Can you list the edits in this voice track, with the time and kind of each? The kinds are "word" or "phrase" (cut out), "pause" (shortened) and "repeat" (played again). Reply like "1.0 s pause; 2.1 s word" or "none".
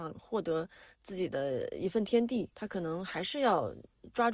2.5 s pause

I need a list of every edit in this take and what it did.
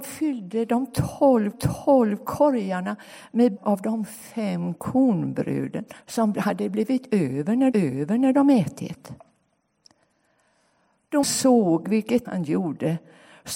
1.5 s repeat; 3.6 s word; 6.0 s pause; 7.7 s repeat; 11.2 s word; 12.2 s word

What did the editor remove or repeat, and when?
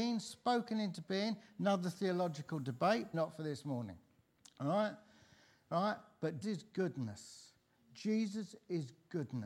3.1 s word; 6.4 s word

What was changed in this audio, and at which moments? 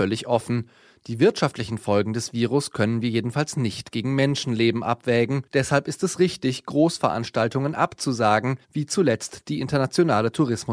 5.5 s pause; 8.6 s pause

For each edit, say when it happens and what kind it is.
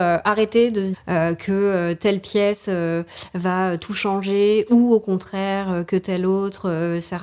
0.9 s word

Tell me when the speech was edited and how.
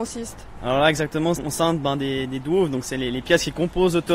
1.4 s word

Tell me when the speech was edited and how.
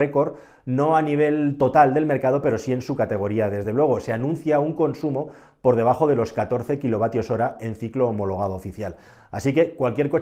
none

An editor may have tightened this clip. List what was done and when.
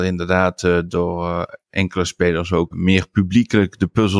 2.7 s word

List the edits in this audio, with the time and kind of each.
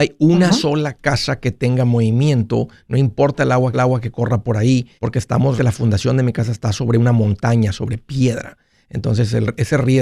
3.7 s repeat; 5.0 s pause; 5.6 s word

